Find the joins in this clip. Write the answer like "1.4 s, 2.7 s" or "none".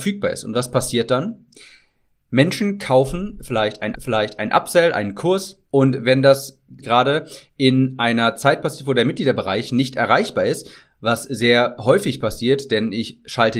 3.9 s, 5.7 s, 6.8 s